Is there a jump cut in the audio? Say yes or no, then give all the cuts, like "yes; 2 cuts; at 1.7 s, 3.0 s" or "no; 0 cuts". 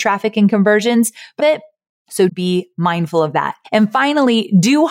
yes; 3 cuts; at 1.4 s, 2.3 s, 3.6 s